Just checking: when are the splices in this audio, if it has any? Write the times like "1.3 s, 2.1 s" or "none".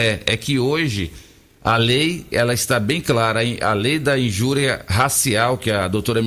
none